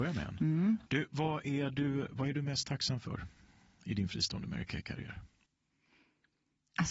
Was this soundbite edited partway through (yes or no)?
no